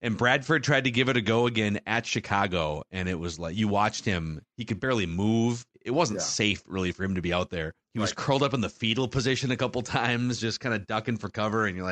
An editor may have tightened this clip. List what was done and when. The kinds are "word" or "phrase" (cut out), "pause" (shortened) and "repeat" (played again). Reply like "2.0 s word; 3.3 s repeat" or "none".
5.7 s pause; 7.8 s pause